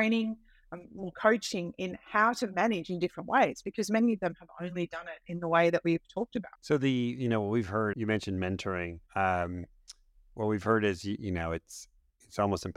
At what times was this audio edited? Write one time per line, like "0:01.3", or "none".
0:06.5
0:07.9
0:09.1